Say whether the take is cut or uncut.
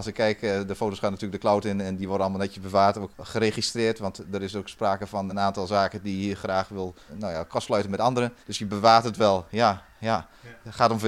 cut